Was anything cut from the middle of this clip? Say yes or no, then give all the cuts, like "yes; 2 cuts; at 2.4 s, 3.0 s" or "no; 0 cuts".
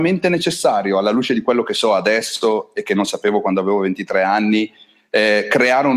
no; 0 cuts